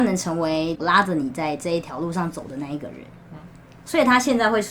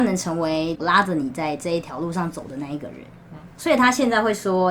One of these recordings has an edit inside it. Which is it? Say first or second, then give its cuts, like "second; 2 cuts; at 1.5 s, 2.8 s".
second; 1 cut; at 3.5 s